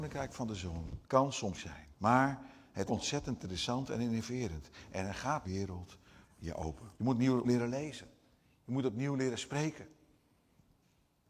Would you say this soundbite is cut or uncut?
cut